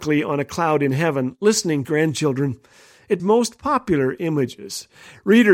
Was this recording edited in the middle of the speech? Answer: yes; 2 cuts; at 1.8 s, 3.2 s

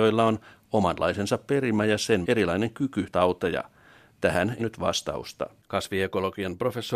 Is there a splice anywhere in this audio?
yes; 3 cuts; at 2.2 s, 3.1 s, 4.6 s

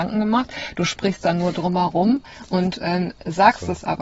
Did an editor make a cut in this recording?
no; 0 cuts

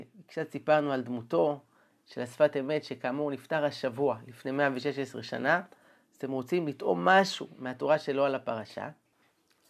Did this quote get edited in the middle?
no; 0 cuts

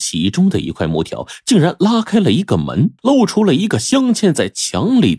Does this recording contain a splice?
yes; 1 cut; at 3.0 s

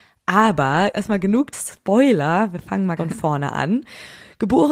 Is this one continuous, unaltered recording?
no; 3 cuts; at 0.9 s, 1.5 s, 3.0 s

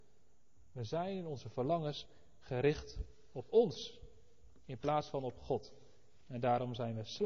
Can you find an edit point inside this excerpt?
no; 0 cuts

